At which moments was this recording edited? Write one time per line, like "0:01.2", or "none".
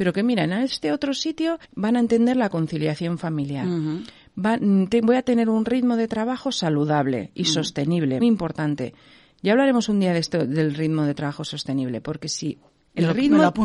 0:01.6
0:08.2

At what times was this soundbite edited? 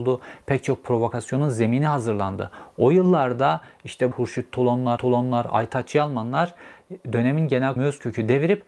0:04.1
0:05.0
0:07.8

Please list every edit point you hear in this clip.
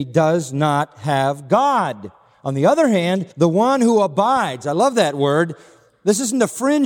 0:03.3

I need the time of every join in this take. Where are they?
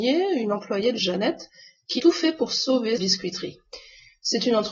0:01.0
0:02.0
0:03.0

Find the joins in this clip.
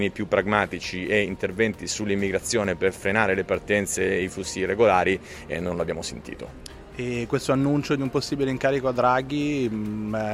none

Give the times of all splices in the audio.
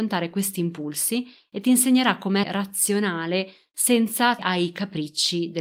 0:02.4
0:04.4

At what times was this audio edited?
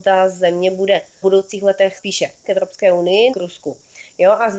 0:01.2
0:02.0
0:02.4
0:03.3

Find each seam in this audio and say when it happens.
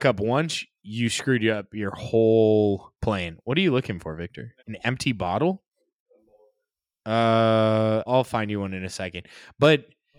0:03.0
0:04.6
0:08.1

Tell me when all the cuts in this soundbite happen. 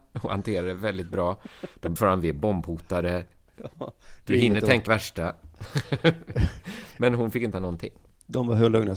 0:02.0
0:04.9
0:07.5

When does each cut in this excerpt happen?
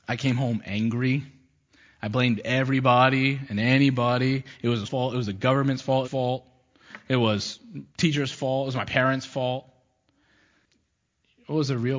0:04.9
0:06.0
0:07.9

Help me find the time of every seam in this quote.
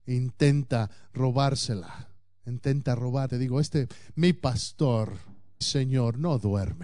0:03.3
0:05.6

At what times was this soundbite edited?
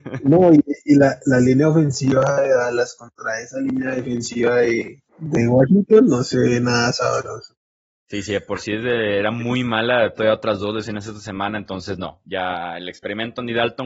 0:05.1
0:10.1

